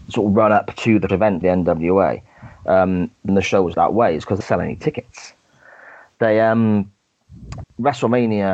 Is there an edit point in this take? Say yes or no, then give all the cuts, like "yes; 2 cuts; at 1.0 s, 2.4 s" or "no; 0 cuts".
yes; 6 cuts; at 1.1 s, 1.4 s, 3.3 s, 3.7 s, 4.4 s, 7.6 s